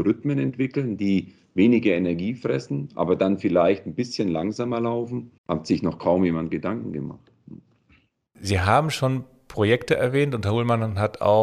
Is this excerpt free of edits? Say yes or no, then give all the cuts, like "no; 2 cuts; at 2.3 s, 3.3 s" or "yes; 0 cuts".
no; 1 cut; at 5.4 s